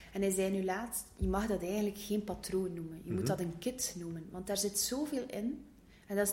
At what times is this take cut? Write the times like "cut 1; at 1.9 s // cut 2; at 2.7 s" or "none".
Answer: none